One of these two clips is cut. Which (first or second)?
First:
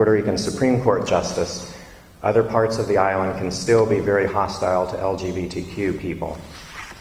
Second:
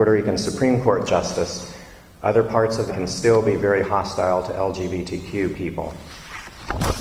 second